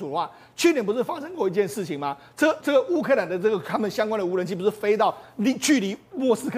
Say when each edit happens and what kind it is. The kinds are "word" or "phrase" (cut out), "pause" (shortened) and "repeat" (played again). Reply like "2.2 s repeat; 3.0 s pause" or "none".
2.6 s word